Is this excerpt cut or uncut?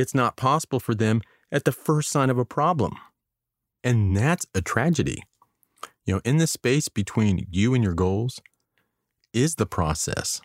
uncut